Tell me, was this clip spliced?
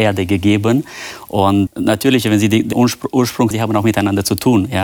yes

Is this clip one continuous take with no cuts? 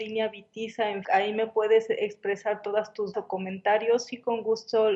no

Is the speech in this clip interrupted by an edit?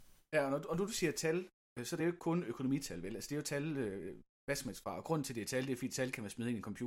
no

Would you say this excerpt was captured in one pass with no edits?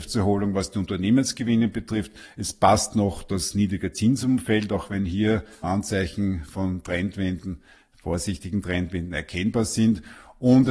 no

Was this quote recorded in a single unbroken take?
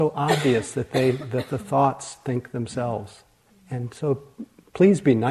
no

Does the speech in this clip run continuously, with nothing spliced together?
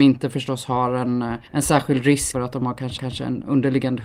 no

